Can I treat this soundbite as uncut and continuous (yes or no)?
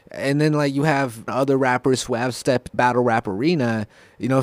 no